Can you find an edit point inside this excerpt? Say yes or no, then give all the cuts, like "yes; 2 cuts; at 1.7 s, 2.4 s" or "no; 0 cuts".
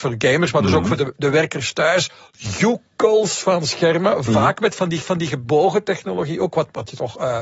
yes; 1 cut; at 5.0 s